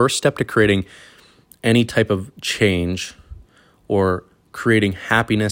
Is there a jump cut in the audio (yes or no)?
no